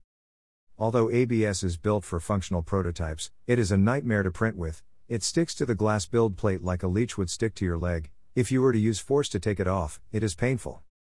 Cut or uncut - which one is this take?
uncut